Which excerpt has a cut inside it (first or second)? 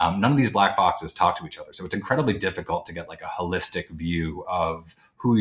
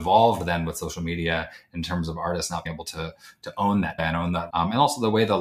second